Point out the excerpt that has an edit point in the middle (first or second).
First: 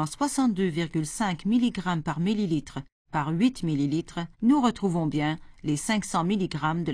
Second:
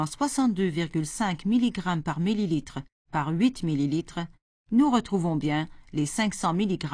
first